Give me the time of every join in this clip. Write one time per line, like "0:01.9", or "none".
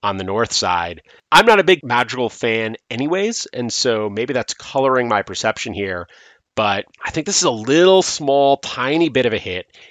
0:06.9